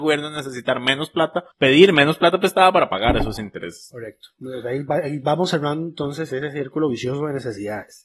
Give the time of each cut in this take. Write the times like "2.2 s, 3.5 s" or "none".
1.5 s